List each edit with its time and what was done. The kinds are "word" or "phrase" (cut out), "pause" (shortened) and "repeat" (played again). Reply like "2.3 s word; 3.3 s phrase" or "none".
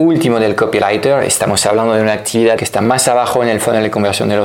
2.6 s phrase